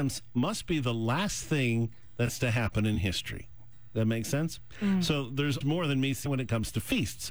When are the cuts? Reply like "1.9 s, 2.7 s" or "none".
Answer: 5.6 s, 6.3 s